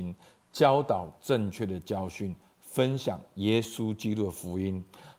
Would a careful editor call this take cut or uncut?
uncut